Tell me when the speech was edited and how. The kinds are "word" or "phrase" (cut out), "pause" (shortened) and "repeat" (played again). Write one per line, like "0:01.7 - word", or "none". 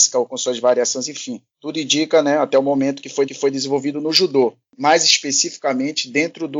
0:01.5 - pause
0:03.3 - repeat